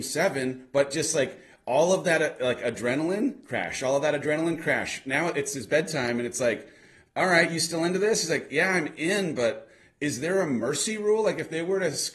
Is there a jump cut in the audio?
no; 0 cuts

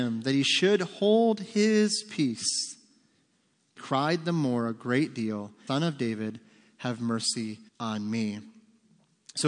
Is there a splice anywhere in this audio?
yes; 3 cuts; at 3.8 s, 5.7 s, 7.7 s

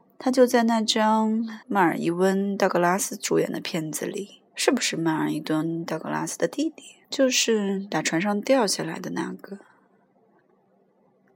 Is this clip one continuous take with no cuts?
no; 3 cuts; at 1.6 s, 4.5 s, 7.0 s

